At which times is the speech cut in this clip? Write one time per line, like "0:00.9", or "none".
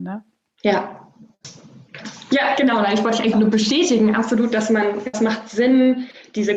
0:03.3
0:05.1